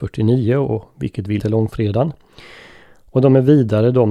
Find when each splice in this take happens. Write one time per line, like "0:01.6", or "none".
0:01.4